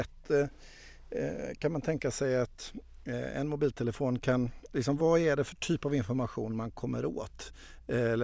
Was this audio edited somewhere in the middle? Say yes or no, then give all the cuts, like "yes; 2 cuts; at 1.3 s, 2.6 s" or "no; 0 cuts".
no; 0 cuts